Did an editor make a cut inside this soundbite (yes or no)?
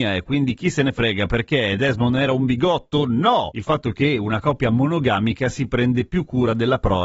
no